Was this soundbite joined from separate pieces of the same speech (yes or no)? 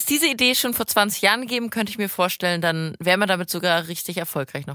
no